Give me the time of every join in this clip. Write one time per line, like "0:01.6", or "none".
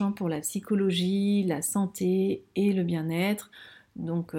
none